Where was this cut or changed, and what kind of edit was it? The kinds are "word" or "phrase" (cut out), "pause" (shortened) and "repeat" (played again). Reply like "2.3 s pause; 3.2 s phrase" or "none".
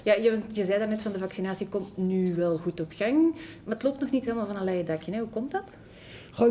none